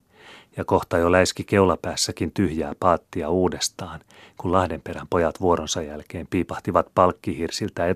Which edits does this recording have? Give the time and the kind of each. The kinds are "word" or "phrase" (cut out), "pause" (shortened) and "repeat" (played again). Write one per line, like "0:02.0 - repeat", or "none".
none